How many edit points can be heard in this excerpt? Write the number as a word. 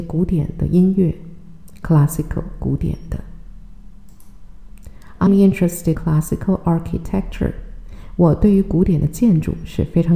two